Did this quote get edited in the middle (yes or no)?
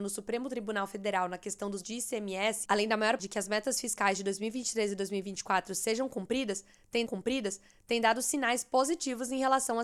yes